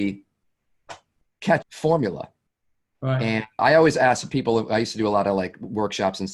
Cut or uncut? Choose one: cut